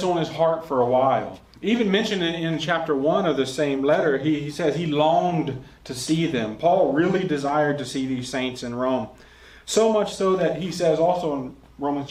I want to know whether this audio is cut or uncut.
uncut